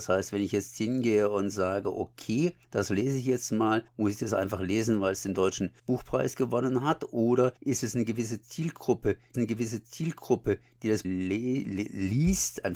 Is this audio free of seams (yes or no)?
no